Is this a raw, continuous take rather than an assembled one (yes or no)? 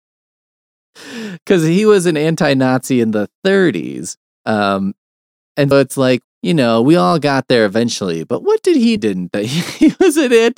no